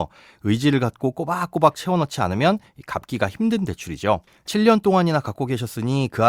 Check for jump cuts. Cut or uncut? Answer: cut